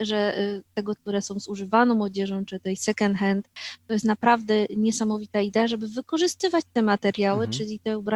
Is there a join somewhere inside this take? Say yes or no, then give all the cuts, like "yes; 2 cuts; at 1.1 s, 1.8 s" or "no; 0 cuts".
yes; 1 cut; at 1.0 s